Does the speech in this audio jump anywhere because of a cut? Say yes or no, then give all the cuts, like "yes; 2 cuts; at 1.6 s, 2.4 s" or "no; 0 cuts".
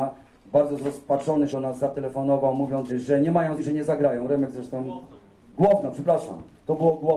yes; 3 cuts; at 1.5 s, 2.9 s, 3.6 s